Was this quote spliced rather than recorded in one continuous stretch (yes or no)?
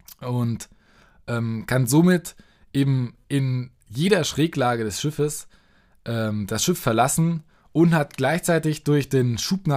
no